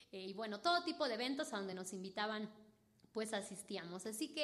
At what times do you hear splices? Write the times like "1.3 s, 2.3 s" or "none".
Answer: none